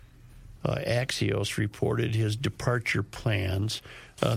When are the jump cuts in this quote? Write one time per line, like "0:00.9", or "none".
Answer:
none